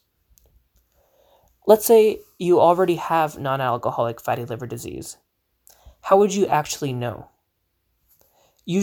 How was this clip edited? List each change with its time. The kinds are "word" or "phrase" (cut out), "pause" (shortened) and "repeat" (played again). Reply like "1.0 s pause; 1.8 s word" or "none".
none